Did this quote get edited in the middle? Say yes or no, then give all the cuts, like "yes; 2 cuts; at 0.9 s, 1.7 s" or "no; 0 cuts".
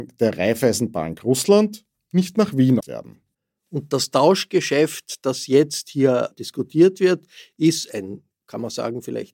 yes; 2 cuts; at 2.8 s, 6.3 s